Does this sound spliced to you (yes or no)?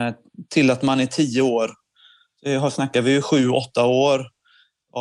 no